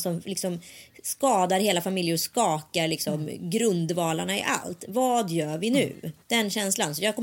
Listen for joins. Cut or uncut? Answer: cut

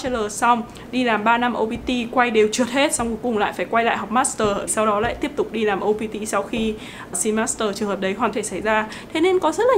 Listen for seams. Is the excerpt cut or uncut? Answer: cut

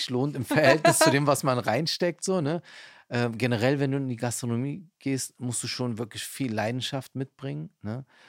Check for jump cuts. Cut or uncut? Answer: uncut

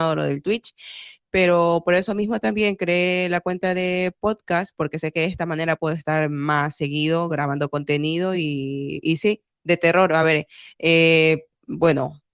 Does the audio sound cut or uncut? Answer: uncut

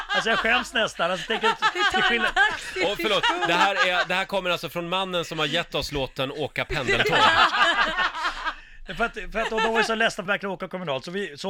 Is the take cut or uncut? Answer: cut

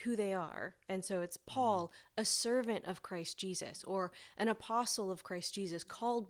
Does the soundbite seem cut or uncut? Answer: uncut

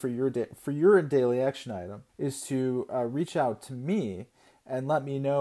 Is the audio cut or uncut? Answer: cut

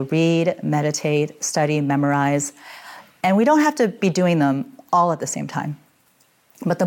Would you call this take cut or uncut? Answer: uncut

